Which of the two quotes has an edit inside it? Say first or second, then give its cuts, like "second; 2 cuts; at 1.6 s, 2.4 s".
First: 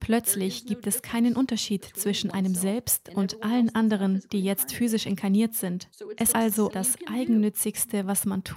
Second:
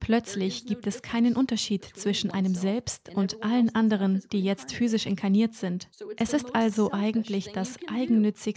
first; 2 cuts; at 6.3 s, 6.7 s